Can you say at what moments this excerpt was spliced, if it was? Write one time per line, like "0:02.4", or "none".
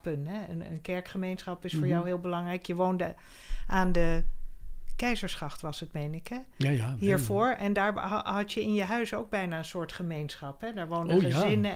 none